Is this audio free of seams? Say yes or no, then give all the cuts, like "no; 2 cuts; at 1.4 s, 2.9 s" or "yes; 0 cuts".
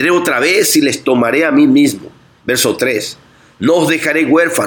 yes; 0 cuts